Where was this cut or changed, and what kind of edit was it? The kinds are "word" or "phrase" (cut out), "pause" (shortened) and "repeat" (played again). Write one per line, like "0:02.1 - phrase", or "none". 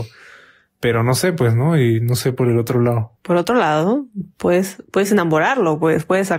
none